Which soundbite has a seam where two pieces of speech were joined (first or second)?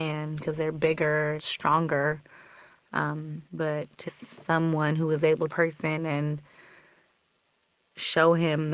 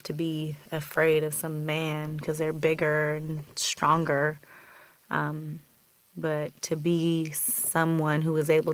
first